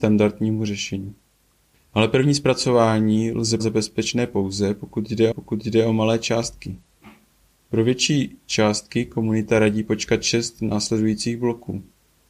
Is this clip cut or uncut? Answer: cut